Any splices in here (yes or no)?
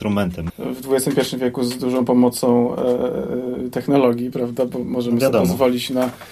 no